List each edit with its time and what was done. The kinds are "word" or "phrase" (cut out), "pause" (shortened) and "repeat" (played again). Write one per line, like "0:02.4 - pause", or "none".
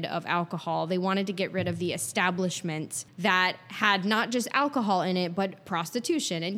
0:03.1 - pause